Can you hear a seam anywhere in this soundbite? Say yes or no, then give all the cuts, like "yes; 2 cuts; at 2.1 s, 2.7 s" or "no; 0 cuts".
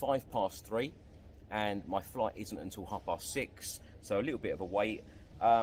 no; 0 cuts